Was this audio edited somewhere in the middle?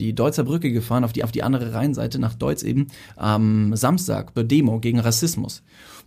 yes; 2 cuts; at 1.2 s, 4.4 s

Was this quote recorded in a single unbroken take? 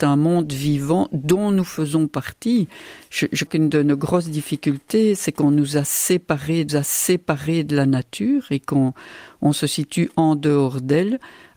no; 2 cuts; at 3.5 s, 6.7 s

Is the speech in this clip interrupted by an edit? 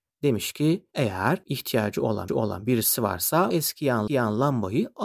yes; 3 cuts; at 2.3 s, 3.5 s, 4.1 s

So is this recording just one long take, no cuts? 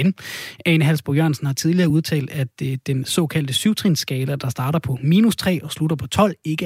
yes; 0 cuts

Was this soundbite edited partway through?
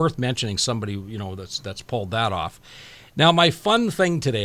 no; 0 cuts

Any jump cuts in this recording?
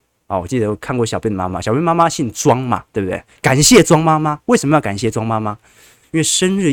no; 0 cuts

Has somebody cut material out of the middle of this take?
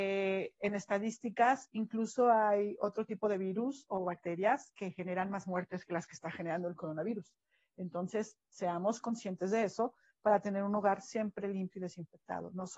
no; 0 cuts

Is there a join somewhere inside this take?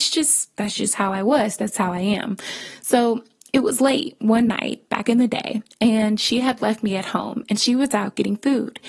no; 0 cuts

